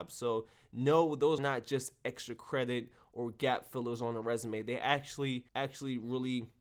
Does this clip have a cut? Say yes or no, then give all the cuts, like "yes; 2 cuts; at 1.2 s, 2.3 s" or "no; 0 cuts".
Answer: yes; 2 cuts; at 1.4 s, 5.5 s